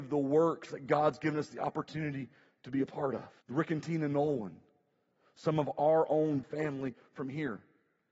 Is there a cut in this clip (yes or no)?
yes